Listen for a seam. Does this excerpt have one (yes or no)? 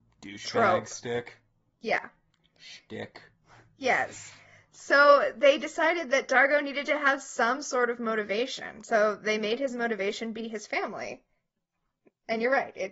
no